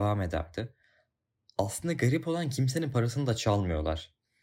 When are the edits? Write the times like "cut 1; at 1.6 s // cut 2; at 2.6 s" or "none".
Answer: none